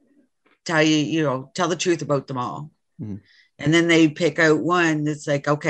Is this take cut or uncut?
uncut